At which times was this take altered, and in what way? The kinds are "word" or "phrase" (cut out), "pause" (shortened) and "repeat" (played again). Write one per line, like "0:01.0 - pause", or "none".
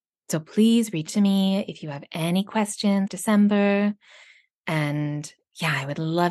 0:01.1 - word
0:03.1 - word